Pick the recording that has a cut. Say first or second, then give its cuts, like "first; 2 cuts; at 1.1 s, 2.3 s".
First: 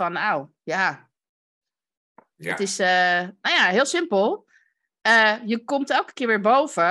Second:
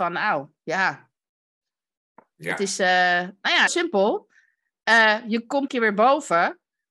second; 2 cuts; at 3.7 s, 5.7 s